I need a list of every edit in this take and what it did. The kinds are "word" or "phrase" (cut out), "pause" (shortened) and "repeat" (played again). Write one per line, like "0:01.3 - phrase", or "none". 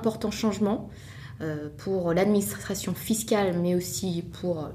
none